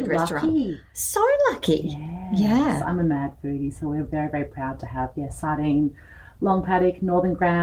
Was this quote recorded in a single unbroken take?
yes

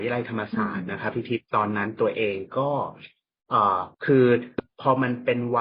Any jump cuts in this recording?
yes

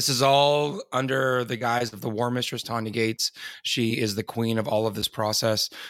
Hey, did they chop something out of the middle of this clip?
no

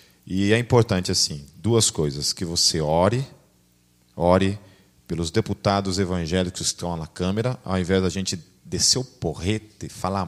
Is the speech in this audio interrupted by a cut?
no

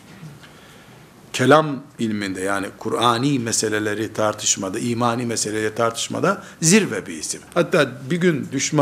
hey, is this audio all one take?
no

